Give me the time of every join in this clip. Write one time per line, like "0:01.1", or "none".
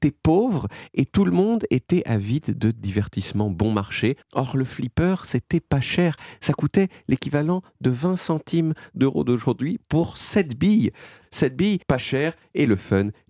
0:04.2
0:11.8